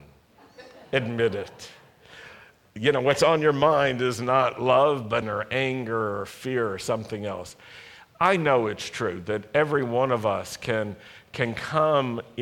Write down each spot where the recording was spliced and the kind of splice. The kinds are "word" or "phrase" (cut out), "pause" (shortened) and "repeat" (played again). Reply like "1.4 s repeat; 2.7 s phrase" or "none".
5.2 s phrase